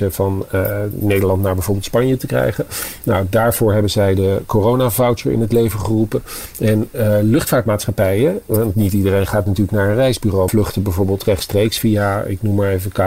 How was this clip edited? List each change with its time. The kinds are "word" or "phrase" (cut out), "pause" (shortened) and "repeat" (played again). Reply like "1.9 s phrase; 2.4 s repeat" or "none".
10.5 s phrase